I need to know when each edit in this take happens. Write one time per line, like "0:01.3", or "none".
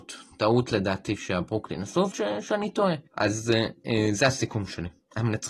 0:02.1
0:03.1